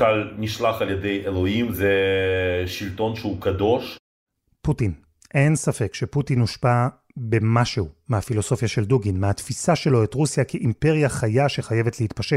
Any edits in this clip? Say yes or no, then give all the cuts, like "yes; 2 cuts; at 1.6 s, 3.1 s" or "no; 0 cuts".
no; 0 cuts